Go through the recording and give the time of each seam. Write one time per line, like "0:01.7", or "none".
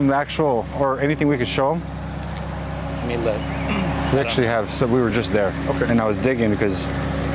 none